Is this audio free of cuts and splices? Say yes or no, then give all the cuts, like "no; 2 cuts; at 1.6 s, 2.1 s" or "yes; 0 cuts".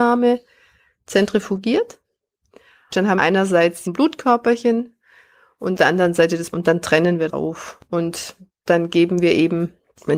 no; 5 cuts; at 3.2 s, 3.9 s, 5.8 s, 6.5 s, 7.3 s